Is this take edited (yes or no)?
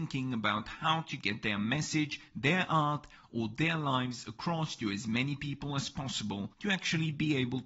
yes